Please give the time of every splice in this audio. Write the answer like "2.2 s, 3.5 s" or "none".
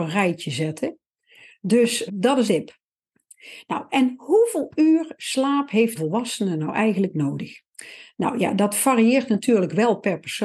2.1 s, 2.5 s, 5.9 s